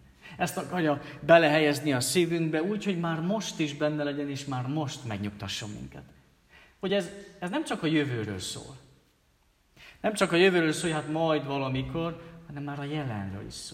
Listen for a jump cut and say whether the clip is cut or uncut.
uncut